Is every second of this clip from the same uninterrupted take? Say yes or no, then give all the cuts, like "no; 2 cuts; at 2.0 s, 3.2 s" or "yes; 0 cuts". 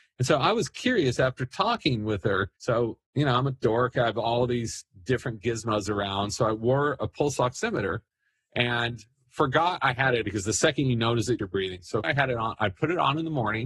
no; 4 cuts; at 2.6 s, 10.2 s, 11.4 s, 12.0 s